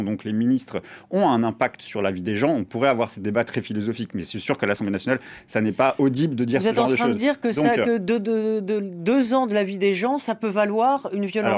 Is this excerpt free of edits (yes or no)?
yes